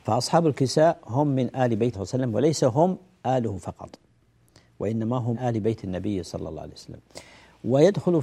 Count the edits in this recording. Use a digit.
2